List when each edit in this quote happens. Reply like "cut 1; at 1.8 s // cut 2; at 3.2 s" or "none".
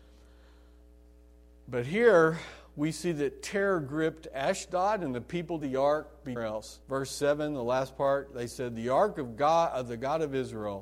cut 1; at 5.6 s // cut 2; at 6.4 s // cut 3; at 6.8 s